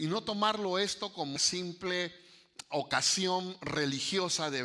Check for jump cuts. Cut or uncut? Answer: cut